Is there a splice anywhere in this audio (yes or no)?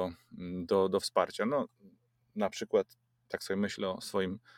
no